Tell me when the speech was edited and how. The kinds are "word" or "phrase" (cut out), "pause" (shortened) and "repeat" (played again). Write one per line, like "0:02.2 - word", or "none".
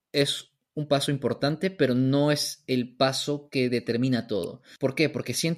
none